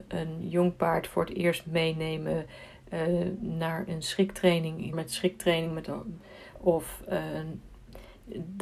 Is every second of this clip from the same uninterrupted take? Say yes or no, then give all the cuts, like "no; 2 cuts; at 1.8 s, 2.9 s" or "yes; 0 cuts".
no; 1 cut; at 4.9 s